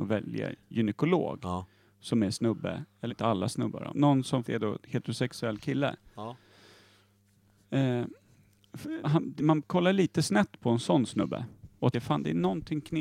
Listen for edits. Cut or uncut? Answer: cut